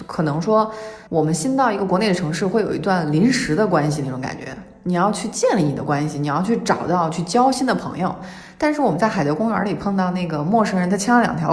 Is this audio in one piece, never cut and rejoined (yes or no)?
no